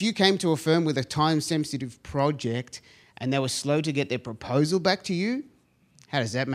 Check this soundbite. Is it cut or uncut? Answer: uncut